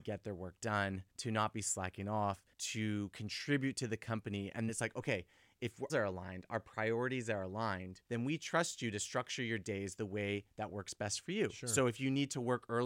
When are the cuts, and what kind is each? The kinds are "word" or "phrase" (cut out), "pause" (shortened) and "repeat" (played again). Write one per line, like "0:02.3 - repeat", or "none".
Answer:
0:01.1 - pause
0:02.5 - pause
0:04.7 - word
0:05.9 - phrase
0:08.1 - pause